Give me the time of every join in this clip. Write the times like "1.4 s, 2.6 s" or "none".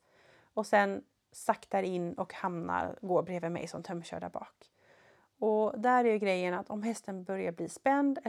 none